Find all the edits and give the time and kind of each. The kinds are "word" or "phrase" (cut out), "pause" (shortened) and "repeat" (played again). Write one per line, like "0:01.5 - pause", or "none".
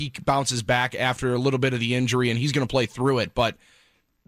none